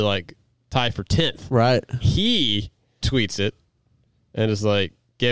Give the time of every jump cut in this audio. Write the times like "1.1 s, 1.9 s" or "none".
2.0 s, 3.0 s

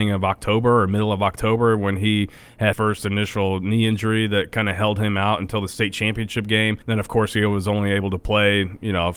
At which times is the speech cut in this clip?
2.7 s, 6.8 s

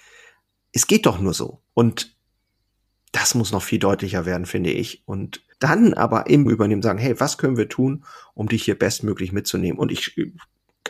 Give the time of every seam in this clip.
1.7 s, 5.5 s, 6.5 s

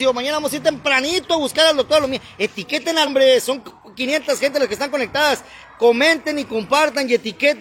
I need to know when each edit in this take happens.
3.1 s

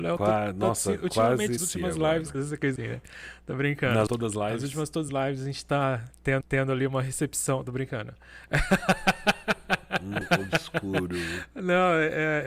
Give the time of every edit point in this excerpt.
1.6 s, 2.3 s, 2.8 s, 4.1 s, 5.1 s, 6.4 s, 10.2 s

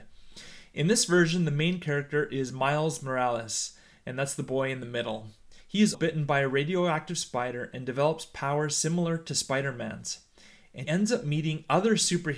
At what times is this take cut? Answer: 5.6 s, 5.9 s, 10.8 s

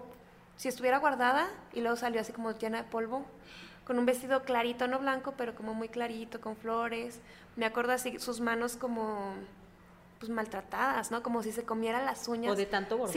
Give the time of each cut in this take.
none

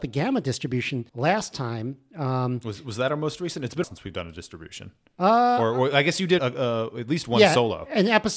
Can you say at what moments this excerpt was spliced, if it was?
1.1 s, 3.8 s, 6.4 s

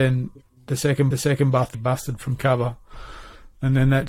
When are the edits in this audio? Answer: 1.1 s, 1.7 s

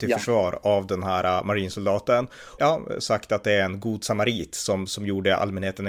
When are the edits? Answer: 2.6 s

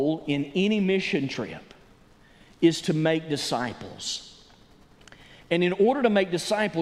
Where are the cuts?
none

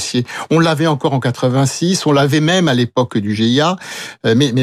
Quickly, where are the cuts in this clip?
none

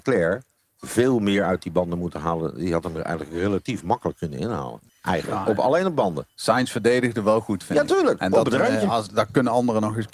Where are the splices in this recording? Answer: 4.2 s, 4.9 s

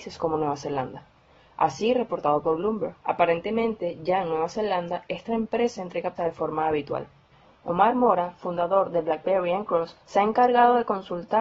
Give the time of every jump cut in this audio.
3.0 s, 6.2 s, 10.0 s

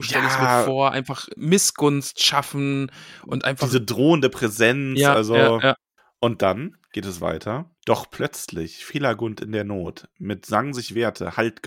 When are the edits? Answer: 1.4 s, 7.8 s

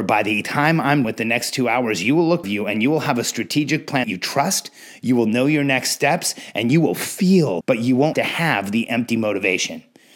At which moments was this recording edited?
1.0 s, 2.4 s, 4.0 s, 7.6 s, 8.1 s

